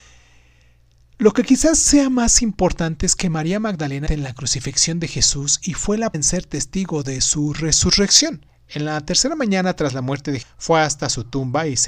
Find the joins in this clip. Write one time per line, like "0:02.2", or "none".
0:04.1
0:06.1
0:08.5
0:10.4